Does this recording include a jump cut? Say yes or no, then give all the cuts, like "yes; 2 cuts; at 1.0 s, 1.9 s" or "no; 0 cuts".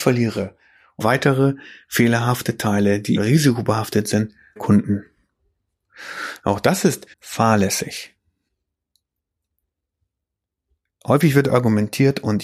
yes; 4 cuts; at 1.0 s, 3.2 s, 4.6 s, 7.1 s